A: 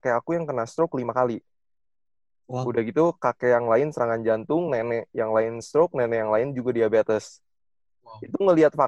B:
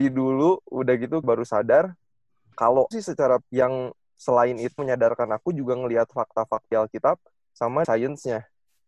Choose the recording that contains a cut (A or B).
B